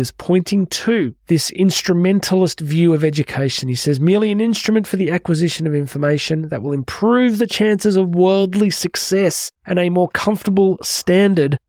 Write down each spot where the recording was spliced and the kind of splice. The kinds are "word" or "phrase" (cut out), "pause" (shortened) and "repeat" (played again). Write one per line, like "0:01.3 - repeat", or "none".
0:01.2 - pause
0:09.6 - pause